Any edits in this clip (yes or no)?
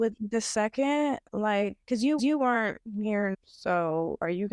yes